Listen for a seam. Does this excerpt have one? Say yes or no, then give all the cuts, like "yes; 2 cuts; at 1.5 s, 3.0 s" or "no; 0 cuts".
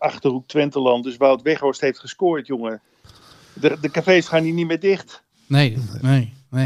no; 0 cuts